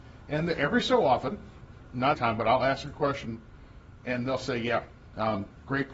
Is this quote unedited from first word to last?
no; 1 cut; at 2.1 s

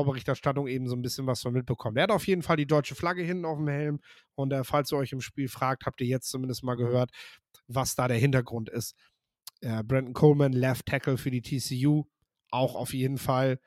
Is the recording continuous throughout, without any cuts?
yes; 0 cuts

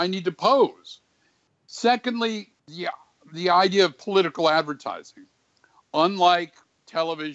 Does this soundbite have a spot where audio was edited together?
yes; 1 cut; at 2.6 s

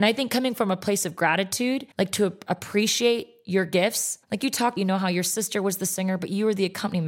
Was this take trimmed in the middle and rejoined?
yes; 3 cuts; at 1.9 s, 4.2 s, 4.8 s

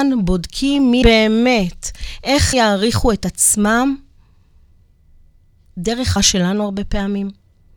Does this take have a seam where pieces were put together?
yes; 3 cuts; at 1.0 s, 2.5 s, 6.2 s

